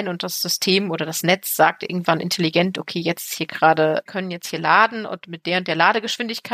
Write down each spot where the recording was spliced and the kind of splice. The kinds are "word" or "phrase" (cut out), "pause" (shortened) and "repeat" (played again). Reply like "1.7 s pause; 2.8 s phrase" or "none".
4.1 s phrase